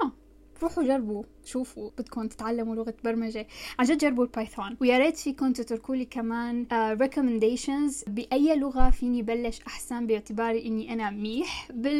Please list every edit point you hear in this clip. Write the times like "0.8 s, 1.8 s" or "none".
1.9 s